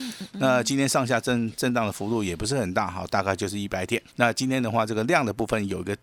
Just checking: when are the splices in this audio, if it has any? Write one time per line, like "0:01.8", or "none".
0:04.1